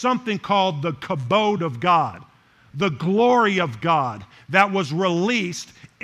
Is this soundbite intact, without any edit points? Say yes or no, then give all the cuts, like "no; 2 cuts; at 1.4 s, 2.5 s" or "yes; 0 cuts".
yes; 0 cuts